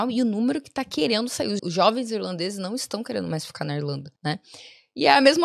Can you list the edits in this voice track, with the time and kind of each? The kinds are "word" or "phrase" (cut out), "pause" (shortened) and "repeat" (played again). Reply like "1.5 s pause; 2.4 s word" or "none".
1.6 s word; 4.2 s pause